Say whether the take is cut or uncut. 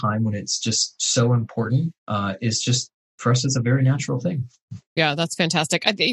cut